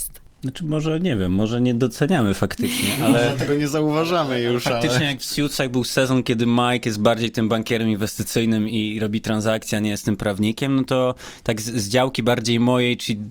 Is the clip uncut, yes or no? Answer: yes